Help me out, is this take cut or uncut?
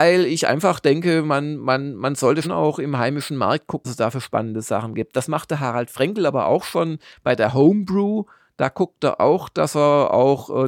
cut